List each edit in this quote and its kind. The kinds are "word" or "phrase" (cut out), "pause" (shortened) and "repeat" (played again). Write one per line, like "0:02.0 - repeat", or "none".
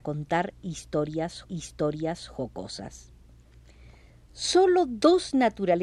0:01.4 - repeat